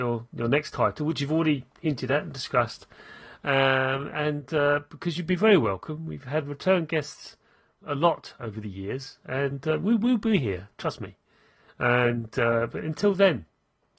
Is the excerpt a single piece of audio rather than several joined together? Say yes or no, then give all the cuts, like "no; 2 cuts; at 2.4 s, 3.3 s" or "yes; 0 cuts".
no; 1 cut; at 7.8 s